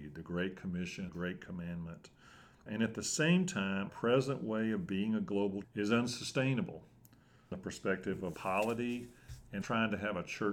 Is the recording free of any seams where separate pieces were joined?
no; 7 cuts; at 1.1 s, 2.7 s, 3.9 s, 5.6 s, 7.5 s, 8.3 s, 9.6 s

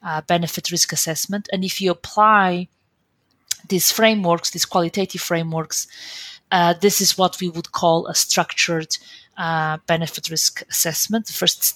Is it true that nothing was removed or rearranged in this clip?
yes; 0 cuts

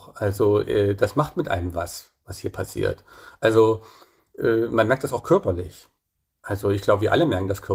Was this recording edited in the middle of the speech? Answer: no; 0 cuts

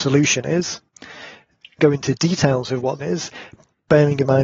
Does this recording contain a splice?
yes; 2 cuts; at 1.8 s, 3.0 s

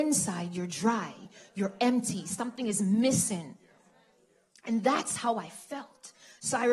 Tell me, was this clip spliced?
no; 0 cuts

